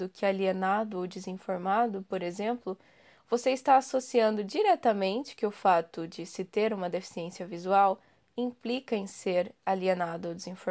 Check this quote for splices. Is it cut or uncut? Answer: uncut